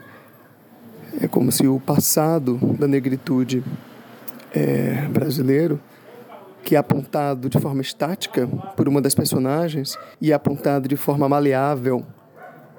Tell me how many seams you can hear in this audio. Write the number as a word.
one